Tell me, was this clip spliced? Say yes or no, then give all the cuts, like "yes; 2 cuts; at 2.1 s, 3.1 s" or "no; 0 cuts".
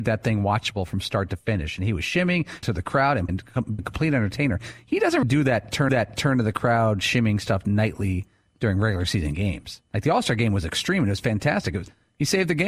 yes; 6 cuts; at 2.6 s, 3.3 s, 3.8 s, 5.2 s, 5.9 s, 9.9 s